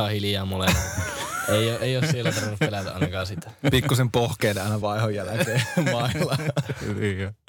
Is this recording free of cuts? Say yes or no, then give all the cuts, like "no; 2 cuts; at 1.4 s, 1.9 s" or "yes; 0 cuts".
yes; 0 cuts